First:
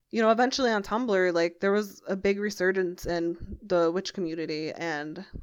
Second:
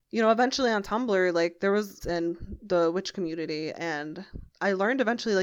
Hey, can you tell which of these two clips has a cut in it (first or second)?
second